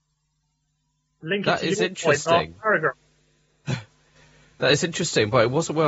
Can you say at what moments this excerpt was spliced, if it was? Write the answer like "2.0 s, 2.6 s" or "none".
none